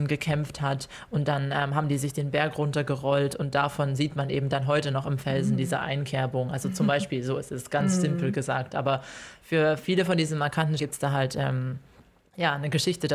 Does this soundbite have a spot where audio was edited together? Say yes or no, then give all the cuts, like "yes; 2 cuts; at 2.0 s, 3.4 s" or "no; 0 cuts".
yes; 1 cut; at 10.8 s